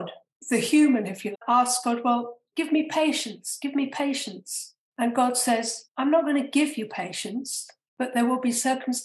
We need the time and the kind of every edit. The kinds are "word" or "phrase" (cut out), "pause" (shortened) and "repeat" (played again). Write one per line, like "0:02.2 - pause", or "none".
0:01.3 - word
0:05.9 - pause